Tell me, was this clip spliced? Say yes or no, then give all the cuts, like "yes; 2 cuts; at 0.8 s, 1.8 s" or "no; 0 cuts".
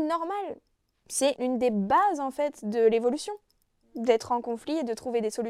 yes; 1 cut; at 1.4 s